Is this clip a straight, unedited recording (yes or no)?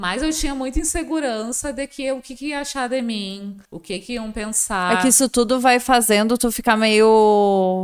no